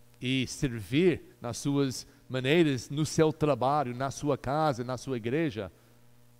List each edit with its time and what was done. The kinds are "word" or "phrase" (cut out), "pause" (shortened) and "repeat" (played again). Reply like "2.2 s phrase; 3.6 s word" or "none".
1.3 s pause